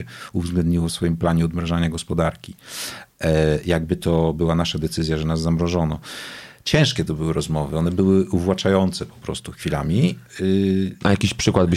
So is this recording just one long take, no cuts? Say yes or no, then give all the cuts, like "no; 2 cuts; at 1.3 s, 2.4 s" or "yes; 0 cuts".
yes; 0 cuts